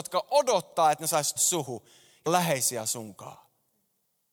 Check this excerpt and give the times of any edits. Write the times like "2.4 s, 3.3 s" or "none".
1.4 s, 2.3 s